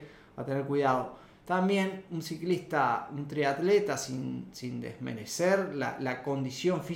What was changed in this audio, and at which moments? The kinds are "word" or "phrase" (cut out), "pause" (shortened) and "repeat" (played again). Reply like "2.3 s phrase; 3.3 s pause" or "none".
none